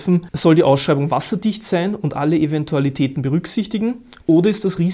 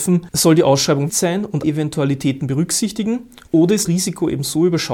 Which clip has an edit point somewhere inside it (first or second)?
second